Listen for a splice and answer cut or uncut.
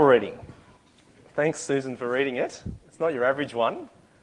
uncut